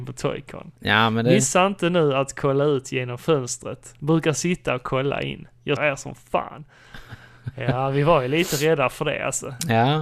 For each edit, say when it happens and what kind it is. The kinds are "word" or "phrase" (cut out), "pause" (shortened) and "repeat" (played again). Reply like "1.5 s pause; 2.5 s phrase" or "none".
5.8 s word